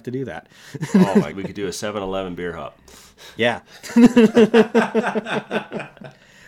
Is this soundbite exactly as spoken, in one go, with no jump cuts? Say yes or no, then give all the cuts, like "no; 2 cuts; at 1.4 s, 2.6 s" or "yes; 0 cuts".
no; 1 cut; at 1.3 s